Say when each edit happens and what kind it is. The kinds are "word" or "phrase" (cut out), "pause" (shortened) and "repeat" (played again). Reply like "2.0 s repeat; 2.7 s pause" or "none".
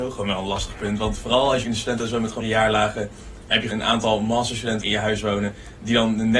1.6 s word; 2.4 s word; 3.7 s word; 4.8 s word